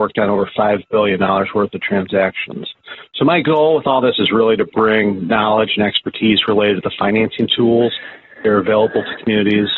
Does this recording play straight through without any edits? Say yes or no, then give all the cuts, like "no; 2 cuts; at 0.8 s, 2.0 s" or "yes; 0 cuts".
yes; 0 cuts